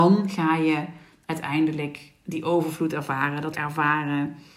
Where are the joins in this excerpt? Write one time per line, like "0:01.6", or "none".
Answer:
0:03.5